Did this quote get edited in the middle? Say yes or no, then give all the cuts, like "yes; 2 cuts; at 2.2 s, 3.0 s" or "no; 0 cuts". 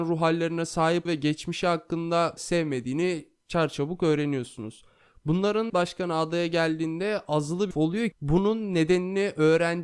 yes; 5 cuts; at 1.0 s, 2.4 s, 5.7 s, 7.7 s, 8.1 s